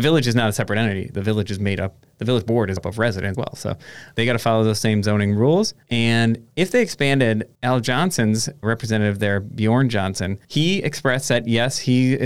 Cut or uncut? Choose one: cut